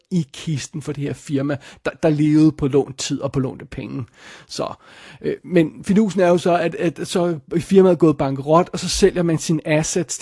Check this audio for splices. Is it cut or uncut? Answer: uncut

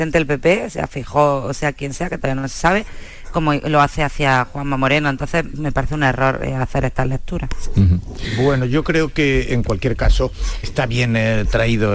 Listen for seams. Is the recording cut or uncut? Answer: cut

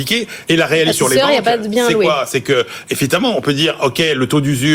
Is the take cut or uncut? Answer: cut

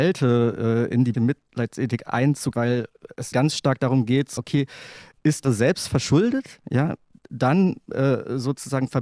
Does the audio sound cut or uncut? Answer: cut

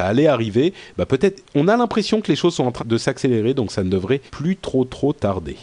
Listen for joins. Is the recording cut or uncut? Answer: cut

